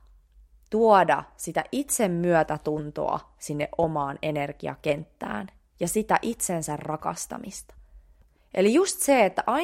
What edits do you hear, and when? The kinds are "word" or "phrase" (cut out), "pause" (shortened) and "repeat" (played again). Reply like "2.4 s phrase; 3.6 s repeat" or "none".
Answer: none